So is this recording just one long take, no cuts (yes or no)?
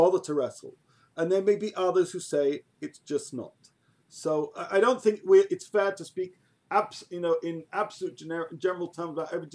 yes